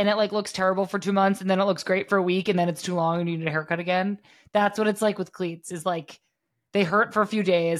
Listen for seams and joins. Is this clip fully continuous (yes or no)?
yes